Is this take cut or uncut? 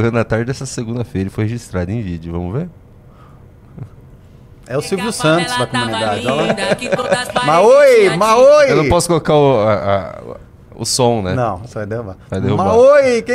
uncut